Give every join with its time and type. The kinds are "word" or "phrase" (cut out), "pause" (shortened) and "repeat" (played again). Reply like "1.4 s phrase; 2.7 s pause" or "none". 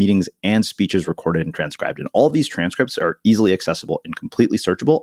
none